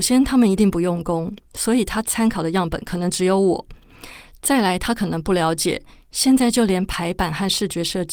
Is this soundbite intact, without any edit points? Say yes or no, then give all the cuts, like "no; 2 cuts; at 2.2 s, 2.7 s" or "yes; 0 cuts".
yes; 0 cuts